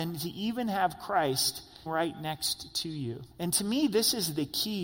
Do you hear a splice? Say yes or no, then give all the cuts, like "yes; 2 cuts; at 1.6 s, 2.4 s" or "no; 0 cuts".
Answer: yes; 2 cuts; at 1.9 s, 3.3 s